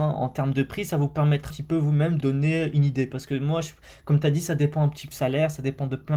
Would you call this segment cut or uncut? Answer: cut